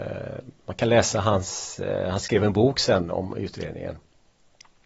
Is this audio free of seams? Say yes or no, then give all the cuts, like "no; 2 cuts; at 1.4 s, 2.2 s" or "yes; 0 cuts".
yes; 0 cuts